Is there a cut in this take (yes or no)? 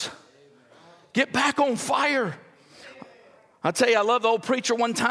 no